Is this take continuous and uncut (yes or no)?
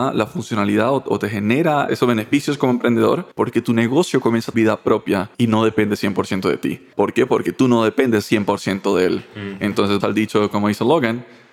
no